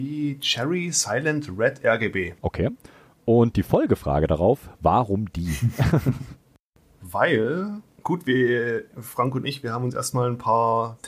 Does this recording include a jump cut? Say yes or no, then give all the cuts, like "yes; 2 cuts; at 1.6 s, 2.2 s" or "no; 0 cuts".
yes; 1 cut; at 2.4 s